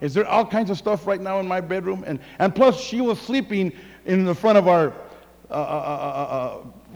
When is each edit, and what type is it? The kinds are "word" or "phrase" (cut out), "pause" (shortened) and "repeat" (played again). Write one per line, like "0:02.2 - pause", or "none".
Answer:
none